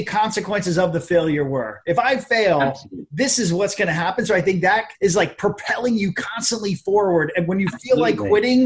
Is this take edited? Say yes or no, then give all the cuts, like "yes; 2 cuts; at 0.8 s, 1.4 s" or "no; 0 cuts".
yes; 1 cut; at 4.9 s